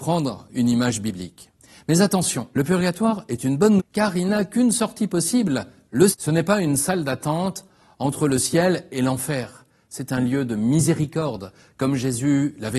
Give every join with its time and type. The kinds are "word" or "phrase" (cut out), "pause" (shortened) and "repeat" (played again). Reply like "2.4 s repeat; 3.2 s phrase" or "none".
2.5 s pause; 3.8 s word; 6.1 s word